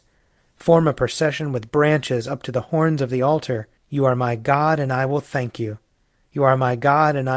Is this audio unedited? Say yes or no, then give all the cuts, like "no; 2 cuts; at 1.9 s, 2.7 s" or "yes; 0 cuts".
no; 1 cut; at 3.8 s